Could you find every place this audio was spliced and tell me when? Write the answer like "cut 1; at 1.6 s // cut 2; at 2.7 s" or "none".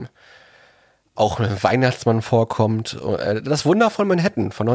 none